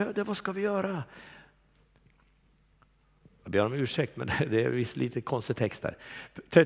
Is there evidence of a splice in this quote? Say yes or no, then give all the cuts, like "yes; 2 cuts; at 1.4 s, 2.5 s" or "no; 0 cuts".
no; 0 cuts